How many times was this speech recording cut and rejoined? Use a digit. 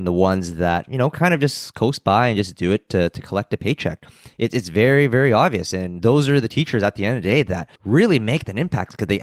1